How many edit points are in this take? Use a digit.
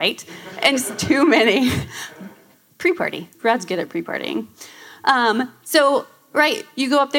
1